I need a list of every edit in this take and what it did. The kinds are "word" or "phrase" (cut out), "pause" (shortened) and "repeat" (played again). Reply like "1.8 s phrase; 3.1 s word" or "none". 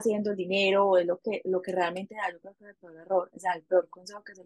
none